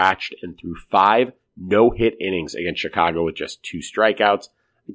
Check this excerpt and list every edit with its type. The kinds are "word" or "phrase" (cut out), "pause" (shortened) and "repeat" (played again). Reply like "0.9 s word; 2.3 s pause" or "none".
none